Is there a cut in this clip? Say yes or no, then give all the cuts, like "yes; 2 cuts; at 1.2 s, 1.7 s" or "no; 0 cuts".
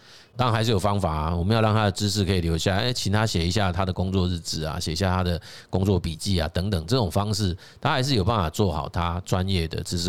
no; 0 cuts